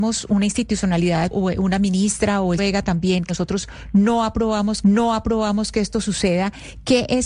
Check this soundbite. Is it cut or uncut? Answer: cut